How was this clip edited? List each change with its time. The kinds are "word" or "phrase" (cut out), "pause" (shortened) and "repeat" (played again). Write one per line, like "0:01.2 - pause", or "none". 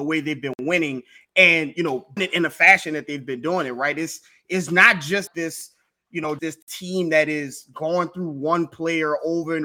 0:02.2 - word
0:05.3 - word
0:06.4 - word